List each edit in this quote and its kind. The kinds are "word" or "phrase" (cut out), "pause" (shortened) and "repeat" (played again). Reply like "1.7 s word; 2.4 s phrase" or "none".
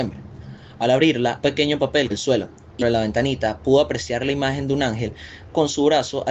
1.4 s word; 2.1 s word; 2.8 s word